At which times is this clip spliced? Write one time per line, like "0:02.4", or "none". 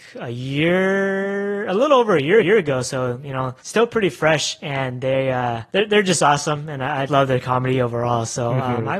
0:02.4
0:03.6
0:05.7
0:07.1